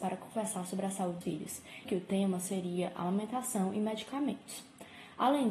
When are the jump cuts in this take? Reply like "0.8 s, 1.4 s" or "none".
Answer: 1.2 s, 1.9 s